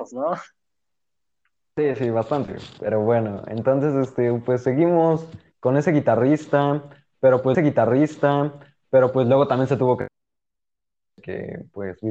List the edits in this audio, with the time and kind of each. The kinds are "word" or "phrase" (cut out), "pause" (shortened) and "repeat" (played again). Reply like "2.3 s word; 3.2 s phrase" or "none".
7.5 s repeat